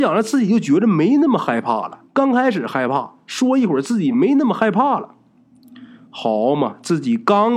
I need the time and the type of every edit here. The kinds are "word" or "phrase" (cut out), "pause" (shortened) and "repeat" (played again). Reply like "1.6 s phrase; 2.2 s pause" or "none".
2.1 s pause